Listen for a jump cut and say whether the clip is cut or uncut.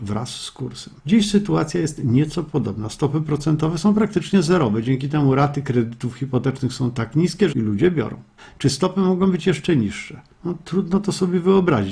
cut